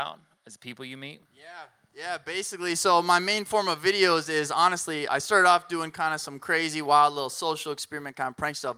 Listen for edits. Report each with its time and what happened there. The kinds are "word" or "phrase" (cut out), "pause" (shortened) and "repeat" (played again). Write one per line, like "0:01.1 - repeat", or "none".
0:01.2 - pause
0:05.1 - word